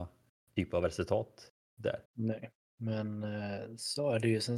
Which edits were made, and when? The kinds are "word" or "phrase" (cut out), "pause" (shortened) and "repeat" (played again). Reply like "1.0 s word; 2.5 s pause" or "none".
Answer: 2.1 s pause